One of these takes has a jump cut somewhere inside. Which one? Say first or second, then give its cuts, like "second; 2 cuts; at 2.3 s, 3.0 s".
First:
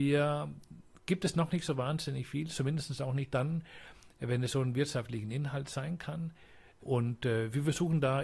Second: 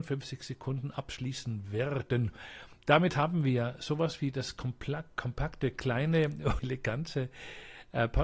second; 1 cut; at 6.6 s